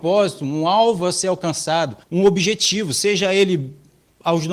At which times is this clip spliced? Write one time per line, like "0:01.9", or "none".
0:02.0